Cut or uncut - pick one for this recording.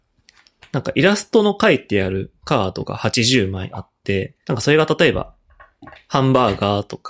cut